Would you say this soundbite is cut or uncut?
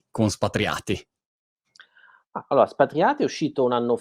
uncut